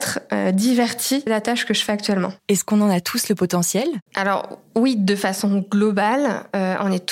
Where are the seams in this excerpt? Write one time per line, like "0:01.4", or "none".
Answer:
0:01.3
0:02.4
0:04.1

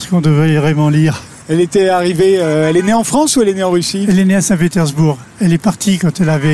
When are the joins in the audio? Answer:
0:01.4

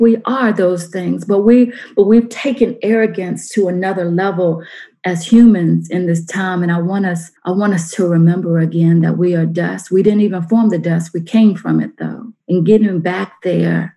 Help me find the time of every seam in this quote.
0:07.4
0:12.4

